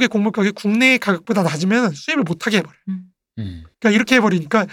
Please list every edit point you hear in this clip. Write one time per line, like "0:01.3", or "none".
0:03.7